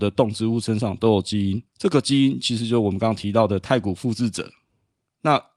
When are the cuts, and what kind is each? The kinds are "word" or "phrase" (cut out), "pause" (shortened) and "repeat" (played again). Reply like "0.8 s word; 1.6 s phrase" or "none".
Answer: 1.7 s pause